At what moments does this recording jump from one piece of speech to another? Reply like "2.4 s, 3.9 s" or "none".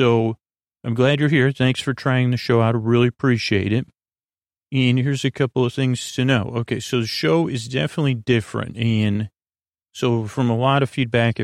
none